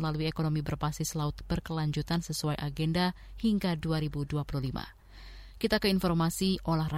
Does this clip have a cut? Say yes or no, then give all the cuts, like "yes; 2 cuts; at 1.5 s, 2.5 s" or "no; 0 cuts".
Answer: no; 0 cuts